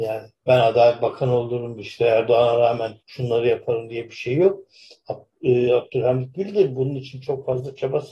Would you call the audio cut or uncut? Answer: cut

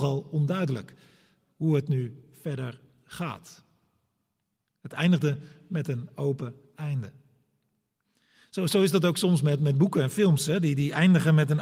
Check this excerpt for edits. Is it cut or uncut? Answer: uncut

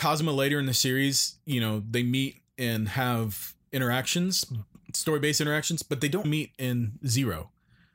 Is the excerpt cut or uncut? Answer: cut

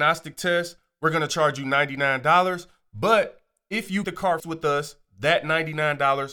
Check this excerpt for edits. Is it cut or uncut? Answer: cut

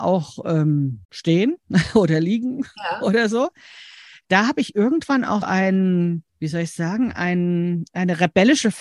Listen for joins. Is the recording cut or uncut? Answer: cut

